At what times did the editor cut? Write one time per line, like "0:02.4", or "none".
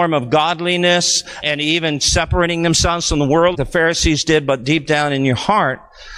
0:01.4
0:03.5